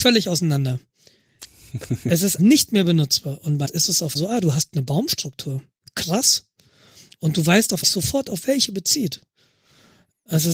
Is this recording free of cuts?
no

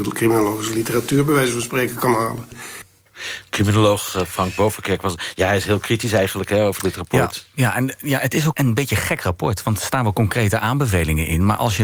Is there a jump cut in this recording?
yes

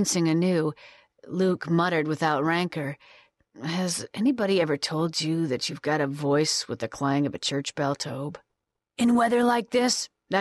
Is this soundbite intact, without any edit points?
yes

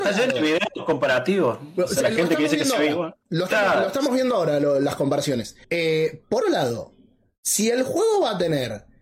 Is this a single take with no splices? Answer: no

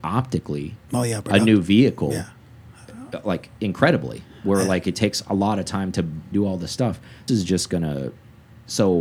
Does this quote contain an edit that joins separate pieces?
yes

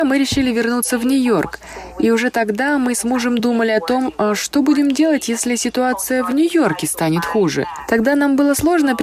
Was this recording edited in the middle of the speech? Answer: no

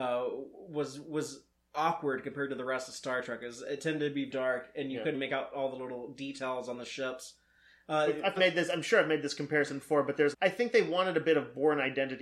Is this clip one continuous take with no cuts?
no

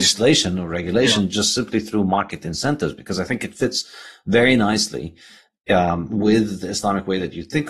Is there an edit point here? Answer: no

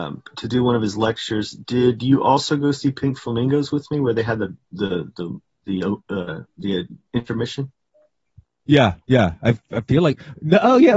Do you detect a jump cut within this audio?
yes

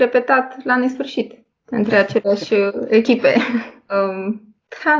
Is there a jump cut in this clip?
no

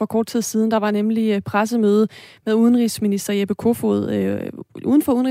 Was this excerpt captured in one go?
yes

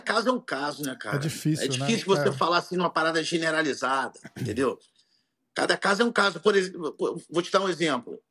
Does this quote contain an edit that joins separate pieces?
no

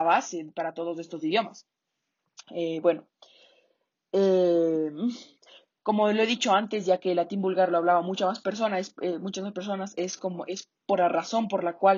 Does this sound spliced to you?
no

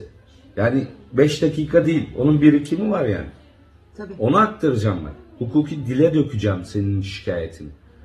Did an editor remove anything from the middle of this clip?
no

